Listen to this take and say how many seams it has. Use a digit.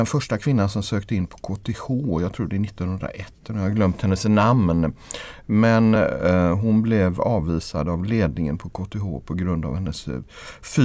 0